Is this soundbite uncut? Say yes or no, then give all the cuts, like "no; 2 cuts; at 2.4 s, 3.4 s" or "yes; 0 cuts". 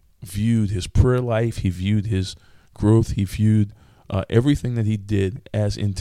yes; 0 cuts